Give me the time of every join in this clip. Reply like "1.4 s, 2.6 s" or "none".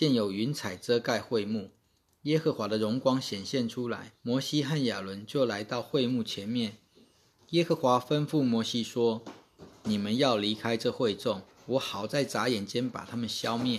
4.2 s, 11.5 s

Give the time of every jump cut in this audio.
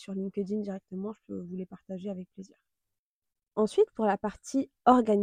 none

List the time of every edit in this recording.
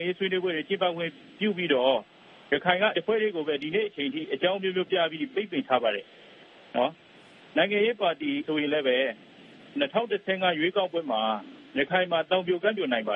2.9 s, 8.4 s, 11.7 s

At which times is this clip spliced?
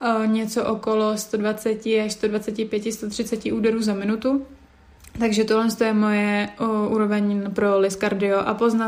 none

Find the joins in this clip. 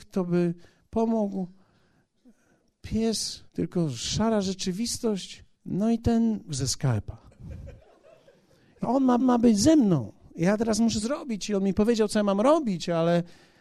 3.5 s, 5.5 s, 6.5 s, 8.8 s, 9.2 s, 11.0 s

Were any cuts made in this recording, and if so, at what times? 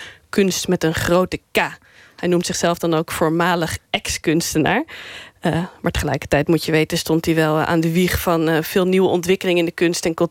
none

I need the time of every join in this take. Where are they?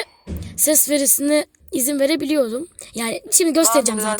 1.6 s, 3.3 s

